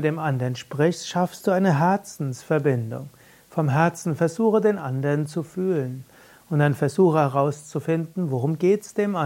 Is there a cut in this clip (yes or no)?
no